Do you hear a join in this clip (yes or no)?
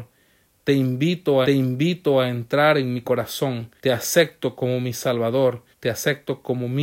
yes